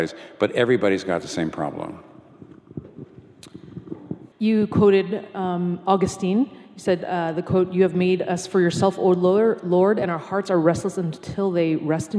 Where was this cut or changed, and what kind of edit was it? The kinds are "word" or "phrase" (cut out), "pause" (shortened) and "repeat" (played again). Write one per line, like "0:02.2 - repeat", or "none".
0:04.3 - pause